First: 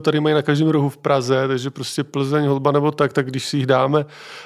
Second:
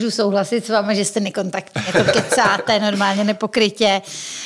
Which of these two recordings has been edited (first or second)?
second